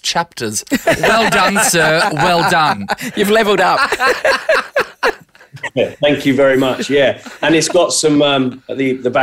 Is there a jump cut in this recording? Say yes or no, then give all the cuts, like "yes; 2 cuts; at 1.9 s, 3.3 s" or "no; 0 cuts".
no; 0 cuts